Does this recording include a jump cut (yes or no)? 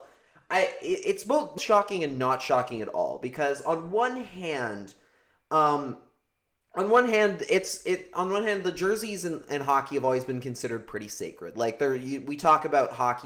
yes